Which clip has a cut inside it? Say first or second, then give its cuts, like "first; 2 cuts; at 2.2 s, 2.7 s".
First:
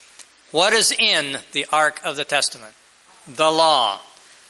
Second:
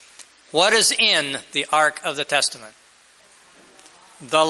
first; 1 cut; at 3.1 s